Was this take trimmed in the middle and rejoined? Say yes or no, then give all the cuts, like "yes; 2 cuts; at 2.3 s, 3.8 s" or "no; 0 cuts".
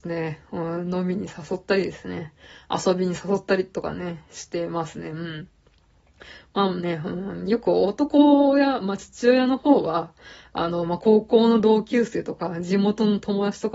no; 0 cuts